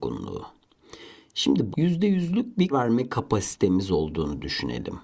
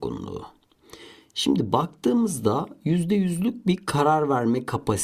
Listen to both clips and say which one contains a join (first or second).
first